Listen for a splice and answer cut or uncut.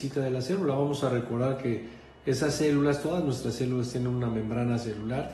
uncut